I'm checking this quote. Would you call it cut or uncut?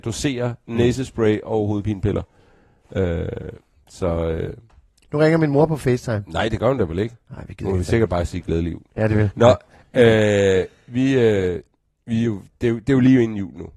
uncut